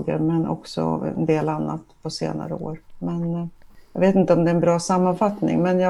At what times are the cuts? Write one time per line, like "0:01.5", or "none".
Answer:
none